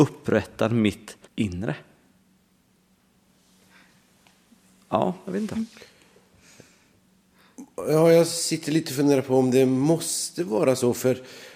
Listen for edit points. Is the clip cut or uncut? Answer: cut